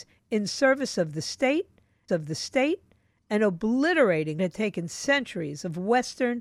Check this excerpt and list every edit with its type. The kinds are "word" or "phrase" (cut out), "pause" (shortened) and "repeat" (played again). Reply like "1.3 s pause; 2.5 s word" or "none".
2.1 s repeat; 4.4 s word